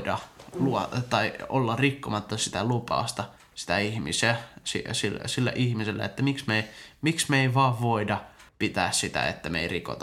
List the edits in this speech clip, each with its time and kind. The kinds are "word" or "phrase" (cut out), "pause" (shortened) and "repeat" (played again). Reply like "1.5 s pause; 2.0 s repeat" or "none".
8.5 s pause